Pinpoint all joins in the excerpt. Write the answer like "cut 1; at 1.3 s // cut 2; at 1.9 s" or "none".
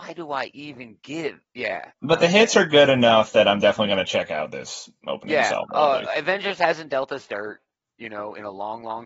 cut 1; at 1.9 s